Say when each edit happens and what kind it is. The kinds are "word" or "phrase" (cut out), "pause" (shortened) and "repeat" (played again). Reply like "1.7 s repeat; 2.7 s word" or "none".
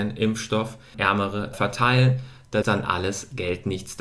0.9 s word; 1.5 s word; 2.6 s word